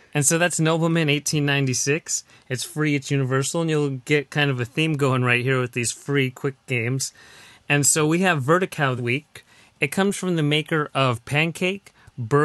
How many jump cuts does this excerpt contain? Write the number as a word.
one